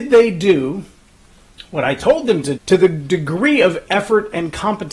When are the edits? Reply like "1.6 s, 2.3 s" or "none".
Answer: 2.6 s